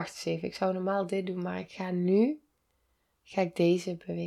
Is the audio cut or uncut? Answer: uncut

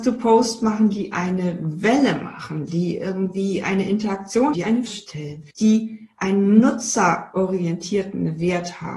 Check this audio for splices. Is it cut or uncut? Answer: cut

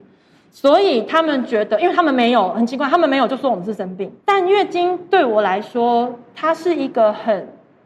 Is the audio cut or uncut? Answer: cut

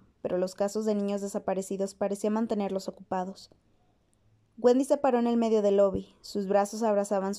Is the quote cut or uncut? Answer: uncut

